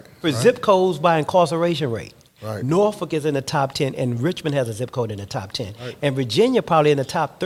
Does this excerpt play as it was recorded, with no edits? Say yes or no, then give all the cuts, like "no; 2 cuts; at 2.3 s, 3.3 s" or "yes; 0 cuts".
yes; 0 cuts